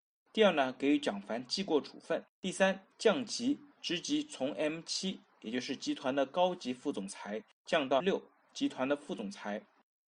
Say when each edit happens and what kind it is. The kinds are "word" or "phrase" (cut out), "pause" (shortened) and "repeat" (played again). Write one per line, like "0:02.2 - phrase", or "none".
0:02.3 - pause
0:03.7 - pause
0:07.5 - pause
0:08.0 - word